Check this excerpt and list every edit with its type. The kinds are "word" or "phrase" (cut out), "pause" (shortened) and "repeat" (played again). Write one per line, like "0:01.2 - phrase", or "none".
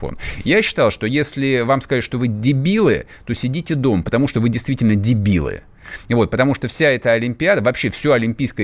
none